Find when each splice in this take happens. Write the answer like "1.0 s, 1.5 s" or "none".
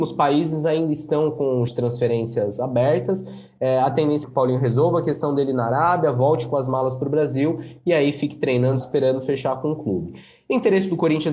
1.7 s, 4.2 s, 8.8 s